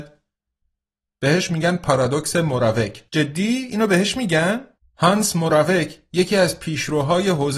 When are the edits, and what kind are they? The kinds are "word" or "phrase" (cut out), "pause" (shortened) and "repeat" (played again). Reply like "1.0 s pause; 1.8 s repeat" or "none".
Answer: 3.1 s pause; 4.8 s pause